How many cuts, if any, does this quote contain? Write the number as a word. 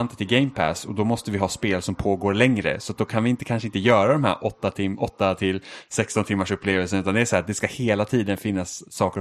zero